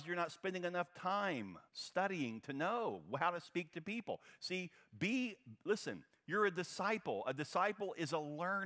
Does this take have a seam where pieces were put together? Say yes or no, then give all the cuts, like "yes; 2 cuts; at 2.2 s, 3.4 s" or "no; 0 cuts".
yes; 1 cut; at 1.7 s